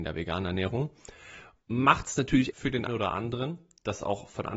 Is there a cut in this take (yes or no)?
yes